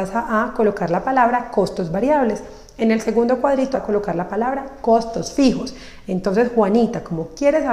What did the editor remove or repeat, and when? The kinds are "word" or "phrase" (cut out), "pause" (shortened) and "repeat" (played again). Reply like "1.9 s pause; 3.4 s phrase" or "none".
3.7 s word